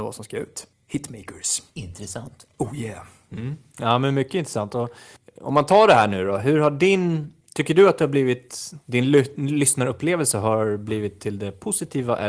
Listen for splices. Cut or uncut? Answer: cut